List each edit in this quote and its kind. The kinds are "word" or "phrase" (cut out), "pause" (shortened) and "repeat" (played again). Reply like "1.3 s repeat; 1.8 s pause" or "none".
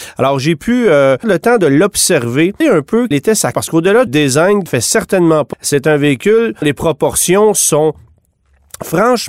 1.2 s word; 2.6 s word; 3.1 s word; 3.5 s word; 4.1 s word; 4.7 s word; 5.5 s word; 6.6 s word